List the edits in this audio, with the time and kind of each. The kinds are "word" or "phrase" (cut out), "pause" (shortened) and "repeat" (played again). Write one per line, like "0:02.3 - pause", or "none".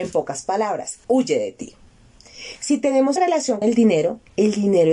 0:01.0 - pause
0:03.2 - word
0:03.6 - word